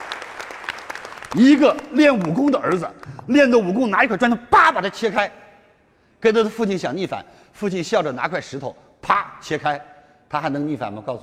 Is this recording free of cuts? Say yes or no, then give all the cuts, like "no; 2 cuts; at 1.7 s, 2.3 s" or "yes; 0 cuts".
yes; 0 cuts